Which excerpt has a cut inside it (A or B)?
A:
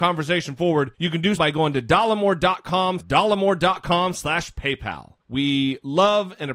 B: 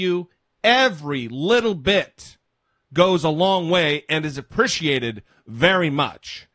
A